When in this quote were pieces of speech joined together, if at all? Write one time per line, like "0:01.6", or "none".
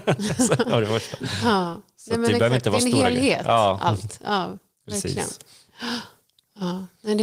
none